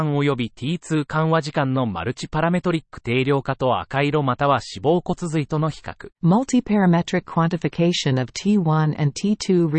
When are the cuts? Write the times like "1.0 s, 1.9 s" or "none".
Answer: 6.1 s